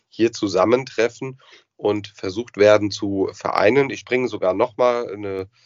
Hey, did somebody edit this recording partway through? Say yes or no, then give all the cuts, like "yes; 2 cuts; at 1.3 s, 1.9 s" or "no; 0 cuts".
no; 0 cuts